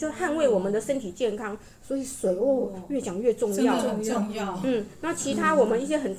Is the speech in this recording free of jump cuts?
yes; 0 cuts

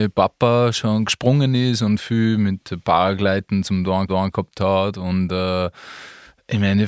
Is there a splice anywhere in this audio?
yes; 1 cut; at 4.1 s

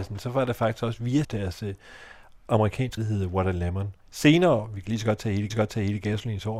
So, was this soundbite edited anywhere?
yes; 4 cuts; at 1.2 s, 3.0 s, 4.0 s, 5.5 s

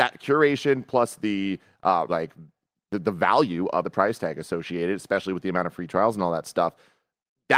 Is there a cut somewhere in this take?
yes; 2 cuts; at 2.1 s, 3.8 s

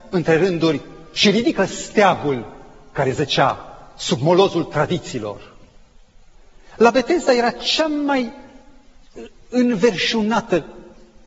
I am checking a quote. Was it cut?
no; 0 cuts

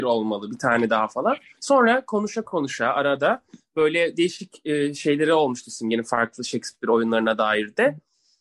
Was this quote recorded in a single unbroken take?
yes; 0 cuts

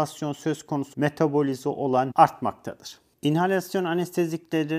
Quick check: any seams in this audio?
yes; 2 cuts; at 0.9 s, 2.1 s

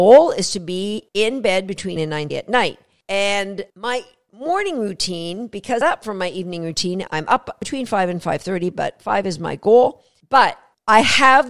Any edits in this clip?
yes; 4 cuts; at 2.0 s, 2.3 s, 3.7 s, 5.8 s

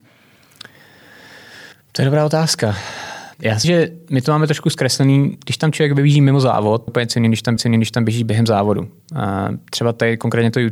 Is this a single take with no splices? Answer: no; 5 cuts; at 1.7 s, 3.3 s, 3.6 s, 6.9 s, 7.6 s

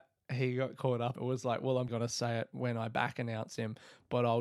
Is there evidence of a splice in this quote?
yes; 2 cuts; at 1.2 s, 1.9 s

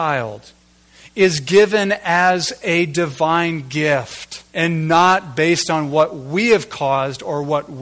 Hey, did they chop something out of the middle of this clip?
yes; 1 cut; at 4.5 s

